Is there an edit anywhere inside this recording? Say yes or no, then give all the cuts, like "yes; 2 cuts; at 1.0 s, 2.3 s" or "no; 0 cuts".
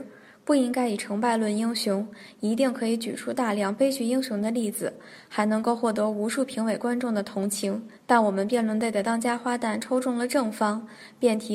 yes; 1 cut; at 8.0 s